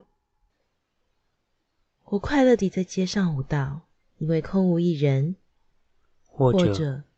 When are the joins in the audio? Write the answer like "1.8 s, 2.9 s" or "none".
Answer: none